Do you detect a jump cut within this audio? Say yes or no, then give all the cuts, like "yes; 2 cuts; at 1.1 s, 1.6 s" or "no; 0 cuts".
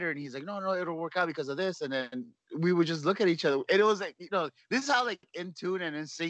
no; 0 cuts